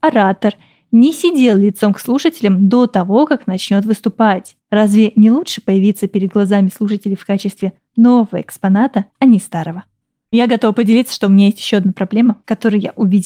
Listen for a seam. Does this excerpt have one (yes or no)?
yes